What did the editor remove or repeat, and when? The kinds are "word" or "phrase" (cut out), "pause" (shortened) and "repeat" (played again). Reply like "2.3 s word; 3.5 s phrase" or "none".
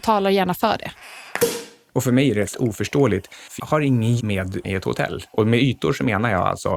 2.5 s word; 3.6 s word; 4.2 s word; 4.6 s word

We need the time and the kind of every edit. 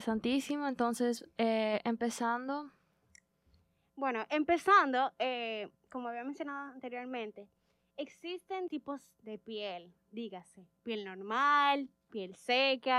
8.7 s word; 10.8 s pause

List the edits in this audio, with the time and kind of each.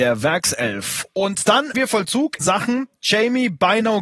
1.7 s word; 2.4 s word

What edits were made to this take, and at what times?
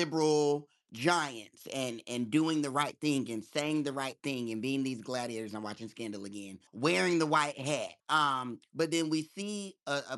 6.7 s pause; 8.0 s pause

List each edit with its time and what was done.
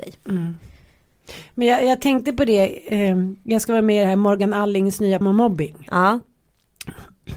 5.2 s word

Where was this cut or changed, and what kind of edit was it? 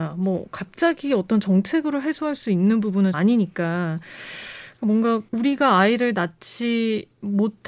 3.1 s word; 5.3 s pause

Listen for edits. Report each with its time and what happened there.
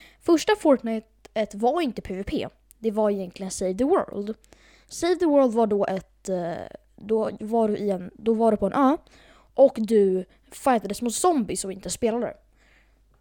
none

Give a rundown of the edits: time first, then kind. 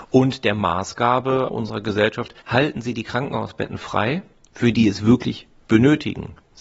1.5 s word; 2.4 s pause; 4.7 s word

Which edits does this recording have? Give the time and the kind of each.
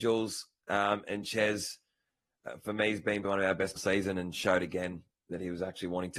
3.2 s word; 3.8 s phrase

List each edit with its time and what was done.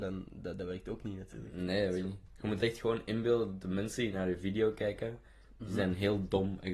none

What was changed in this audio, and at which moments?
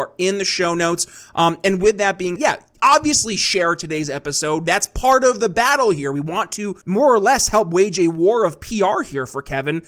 2.4 s word; 6.8 s pause

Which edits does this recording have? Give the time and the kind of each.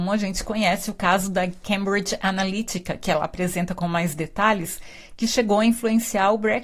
none

